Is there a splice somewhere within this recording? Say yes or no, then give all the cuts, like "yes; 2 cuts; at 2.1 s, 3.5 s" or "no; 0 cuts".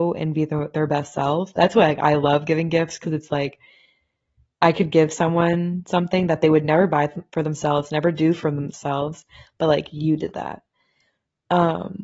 no; 0 cuts